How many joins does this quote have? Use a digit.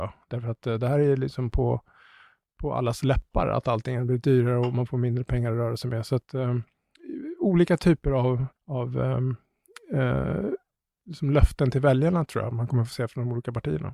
1